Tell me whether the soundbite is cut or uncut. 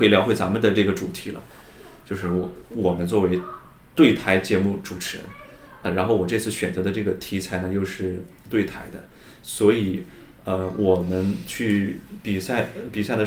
uncut